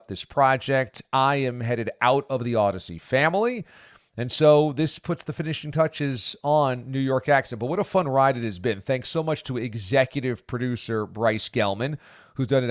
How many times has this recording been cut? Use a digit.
0